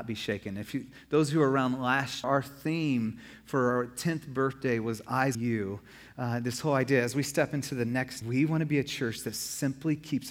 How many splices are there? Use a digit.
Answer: 3